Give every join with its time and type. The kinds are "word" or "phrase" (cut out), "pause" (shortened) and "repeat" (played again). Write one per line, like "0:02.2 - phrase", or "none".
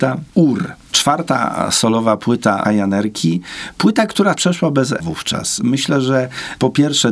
0:02.6 - word
0:04.4 - word
0:05.0 - word